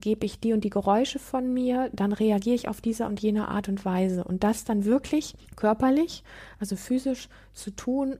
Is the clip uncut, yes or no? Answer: no